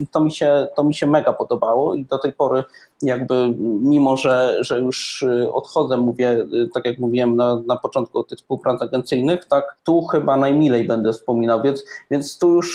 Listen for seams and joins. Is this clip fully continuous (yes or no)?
yes